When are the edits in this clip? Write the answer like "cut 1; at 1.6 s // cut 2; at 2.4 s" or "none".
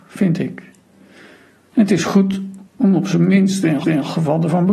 cut 1; at 2.7 s // cut 2; at 3.8 s